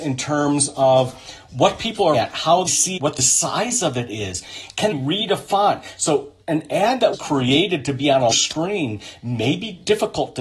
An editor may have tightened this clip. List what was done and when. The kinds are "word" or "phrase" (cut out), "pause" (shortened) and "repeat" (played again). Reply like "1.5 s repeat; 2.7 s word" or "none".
2.1 s word; 2.7 s word; 3.0 s word; 4.9 s word; 7.1 s word; 8.3 s word